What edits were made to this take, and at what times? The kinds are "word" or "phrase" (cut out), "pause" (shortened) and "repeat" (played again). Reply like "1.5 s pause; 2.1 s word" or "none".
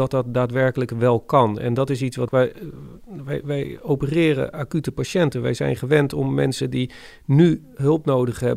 2.3 s word

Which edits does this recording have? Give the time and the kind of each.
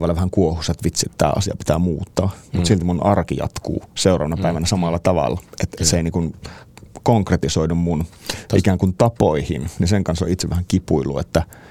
none

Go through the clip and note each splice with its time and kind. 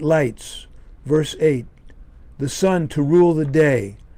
none

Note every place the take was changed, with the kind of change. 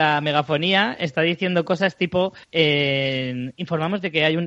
2.4 s pause

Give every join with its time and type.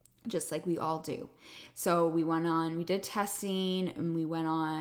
none

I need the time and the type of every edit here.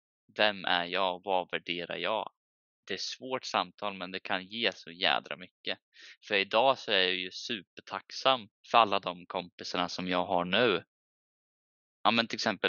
8.6 s pause

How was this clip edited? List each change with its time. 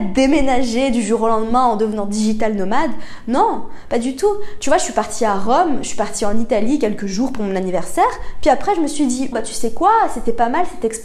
9.3 s word

